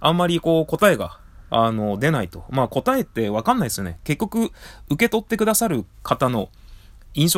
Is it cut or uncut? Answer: cut